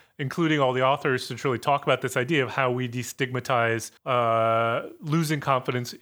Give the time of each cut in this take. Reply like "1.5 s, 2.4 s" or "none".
4.0 s